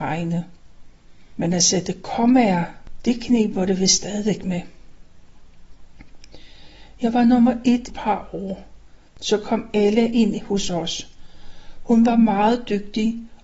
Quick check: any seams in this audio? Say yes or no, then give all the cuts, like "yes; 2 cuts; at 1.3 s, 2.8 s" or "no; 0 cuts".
yes; 1 cut; at 7.9 s